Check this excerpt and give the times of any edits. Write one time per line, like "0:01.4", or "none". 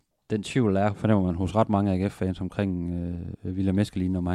0:00.9